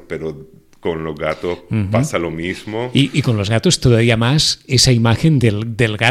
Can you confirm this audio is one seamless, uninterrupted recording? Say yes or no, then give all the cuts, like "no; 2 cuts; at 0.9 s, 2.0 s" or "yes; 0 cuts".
no; 1 cut; at 3.8 s